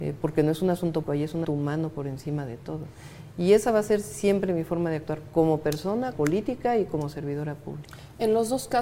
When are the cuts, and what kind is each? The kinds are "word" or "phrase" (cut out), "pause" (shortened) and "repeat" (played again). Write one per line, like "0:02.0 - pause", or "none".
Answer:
0:01.0 - word
0:01.4 - word
0:06.1 - word